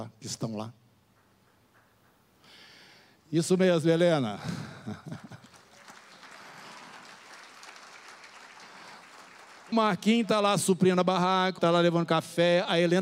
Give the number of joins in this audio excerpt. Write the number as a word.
two